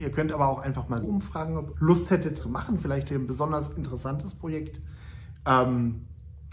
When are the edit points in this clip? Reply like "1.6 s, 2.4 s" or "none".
1.0 s, 1.7 s, 2.4 s, 3.1 s